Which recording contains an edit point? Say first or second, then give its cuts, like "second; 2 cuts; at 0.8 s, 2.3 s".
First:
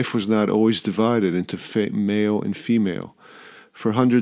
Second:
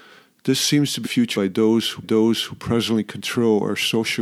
second; 3 cuts; at 1.0 s, 1.3 s, 2.0 s